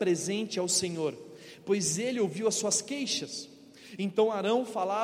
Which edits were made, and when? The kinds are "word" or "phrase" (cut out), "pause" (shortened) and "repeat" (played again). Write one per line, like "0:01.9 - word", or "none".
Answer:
none